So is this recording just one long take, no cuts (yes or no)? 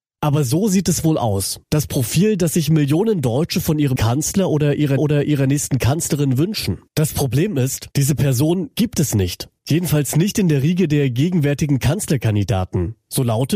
no